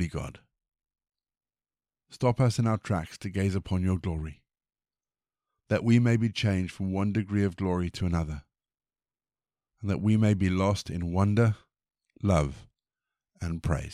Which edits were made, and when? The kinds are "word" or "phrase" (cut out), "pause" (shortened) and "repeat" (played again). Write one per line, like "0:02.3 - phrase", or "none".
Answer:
none